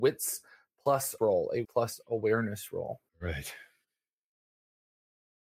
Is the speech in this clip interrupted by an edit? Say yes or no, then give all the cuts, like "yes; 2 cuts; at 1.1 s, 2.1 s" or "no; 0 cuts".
yes; 3 cuts; at 1.2 s, 1.6 s, 3.1 s